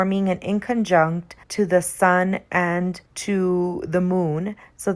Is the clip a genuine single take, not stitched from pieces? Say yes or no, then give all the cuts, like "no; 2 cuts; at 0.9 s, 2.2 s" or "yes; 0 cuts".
no; 2 cuts; at 1.4 s, 3.1 s